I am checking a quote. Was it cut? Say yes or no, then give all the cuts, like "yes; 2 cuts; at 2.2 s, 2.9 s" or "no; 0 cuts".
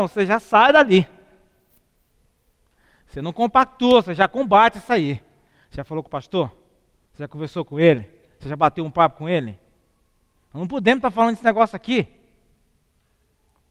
no; 0 cuts